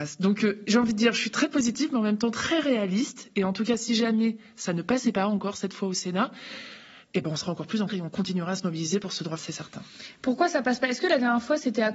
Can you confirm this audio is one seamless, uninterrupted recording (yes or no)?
no